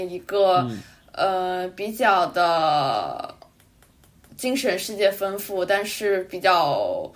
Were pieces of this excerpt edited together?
no; 0 cuts

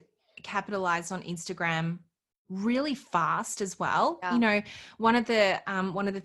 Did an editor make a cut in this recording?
no; 0 cuts

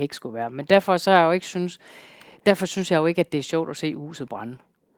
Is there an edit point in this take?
no; 0 cuts

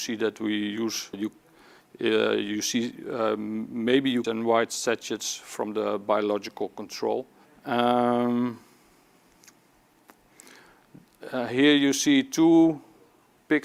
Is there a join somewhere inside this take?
yes; 3 cuts; at 1.1 s, 4.2 s, 7.5 s

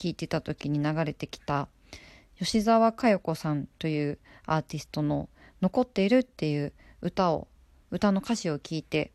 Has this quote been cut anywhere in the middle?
no; 0 cuts

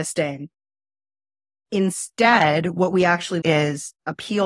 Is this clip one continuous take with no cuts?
no; 1 cut; at 3.4 s

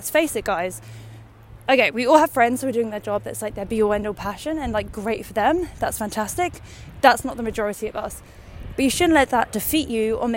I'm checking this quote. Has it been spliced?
no; 0 cuts

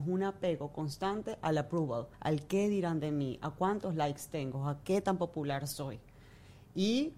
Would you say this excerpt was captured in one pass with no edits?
no; 1 cut; at 2.1 s

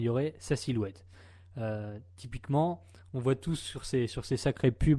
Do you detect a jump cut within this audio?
no; 0 cuts

